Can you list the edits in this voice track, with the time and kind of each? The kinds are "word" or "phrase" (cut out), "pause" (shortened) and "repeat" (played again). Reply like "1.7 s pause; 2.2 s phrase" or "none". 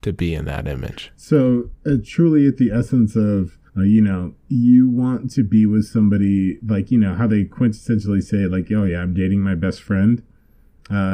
3.7 s pause; 4.4 s pause

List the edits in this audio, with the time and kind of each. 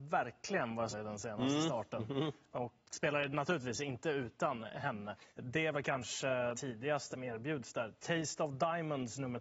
0.9 s phrase; 2.8 s word; 5.3 s pause; 6.5 s word; 7.1 s phrase

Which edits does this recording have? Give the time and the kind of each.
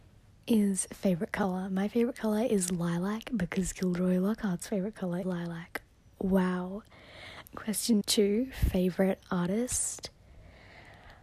5.2 s word; 8.0 s word

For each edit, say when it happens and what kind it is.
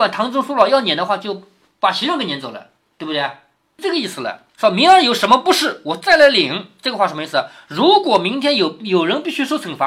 4.5 s pause

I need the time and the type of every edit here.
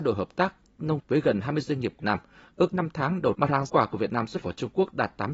1.0 s word; 2.0 s word; 2.7 s word; 3.3 s word; 3.7 s word; 4.4 s word

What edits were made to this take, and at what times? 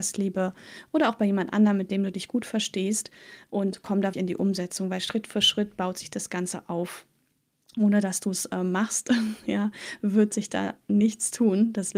4.1 s word

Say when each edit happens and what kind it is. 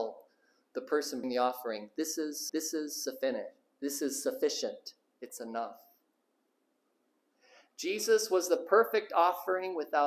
1.2 s word; 2.5 s repeat

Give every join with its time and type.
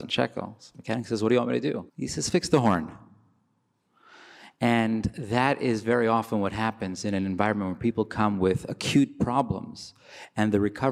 1.9 s pause

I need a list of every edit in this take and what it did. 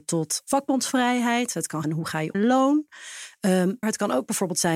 1.8 s word; 2.3 s phrase; 3.8 s word

